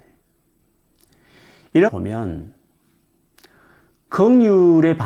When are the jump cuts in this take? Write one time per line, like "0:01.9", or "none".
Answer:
0:01.9